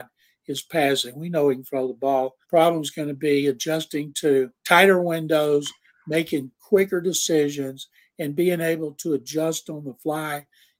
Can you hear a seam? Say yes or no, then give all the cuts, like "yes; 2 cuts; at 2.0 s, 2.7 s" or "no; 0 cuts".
yes; 2 cuts; at 2.4 s, 4.6 s